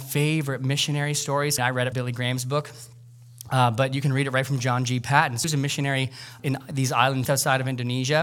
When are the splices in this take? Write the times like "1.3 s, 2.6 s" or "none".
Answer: 1.6 s, 1.9 s, 5.4 s, 6.4 s, 7.2 s